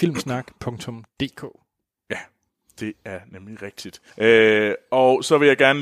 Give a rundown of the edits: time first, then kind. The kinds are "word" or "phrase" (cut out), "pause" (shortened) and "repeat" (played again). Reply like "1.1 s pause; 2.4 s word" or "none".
4.1 s pause